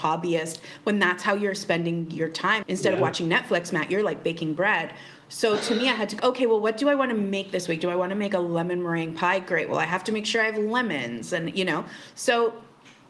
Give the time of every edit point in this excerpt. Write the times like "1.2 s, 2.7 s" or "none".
2.6 s, 6.2 s

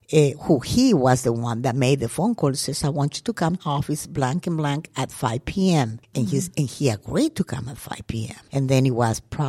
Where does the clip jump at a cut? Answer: 3.6 s

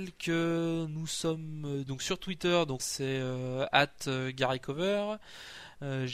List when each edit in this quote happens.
1.9 s, 2.8 s

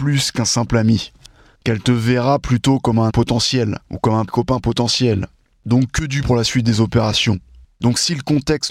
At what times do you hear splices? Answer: 3.1 s, 3.9 s, 4.3 s, 6.2 s

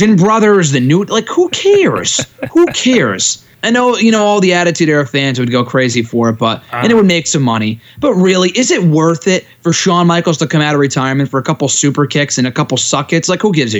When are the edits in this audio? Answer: 3.5 s

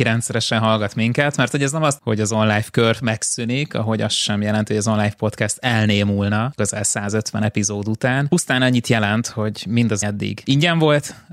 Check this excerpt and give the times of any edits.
2.0 s, 10.0 s

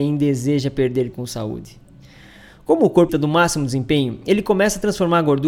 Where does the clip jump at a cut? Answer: 1.1 s, 3.1 s

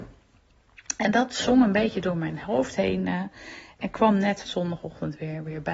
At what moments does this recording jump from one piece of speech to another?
4.5 s

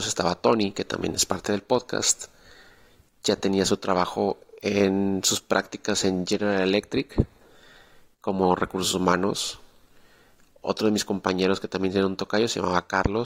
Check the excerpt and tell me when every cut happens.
none

